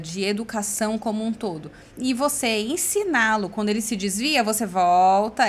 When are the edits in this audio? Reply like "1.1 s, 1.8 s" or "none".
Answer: 1.9 s